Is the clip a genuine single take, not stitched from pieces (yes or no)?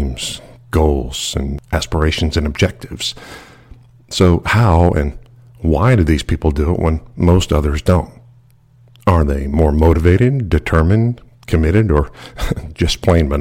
yes